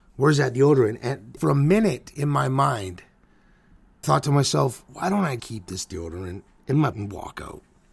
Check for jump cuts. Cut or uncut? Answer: cut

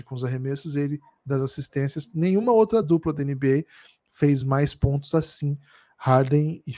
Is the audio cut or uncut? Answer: uncut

